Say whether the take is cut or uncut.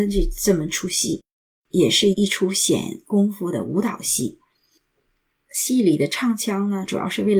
uncut